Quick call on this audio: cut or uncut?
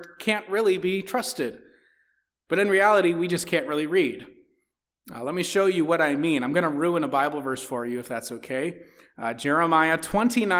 uncut